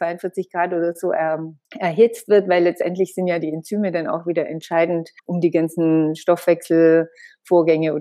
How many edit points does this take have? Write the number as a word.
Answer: two